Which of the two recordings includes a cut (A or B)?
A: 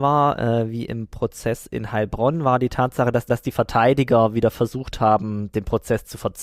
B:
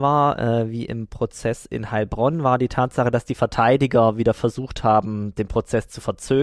A